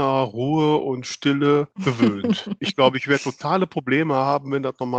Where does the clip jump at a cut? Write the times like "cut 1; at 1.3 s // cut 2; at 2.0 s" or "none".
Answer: cut 1; at 1.7 s